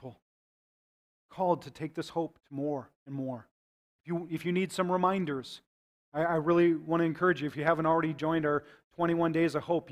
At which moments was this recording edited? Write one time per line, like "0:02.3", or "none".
none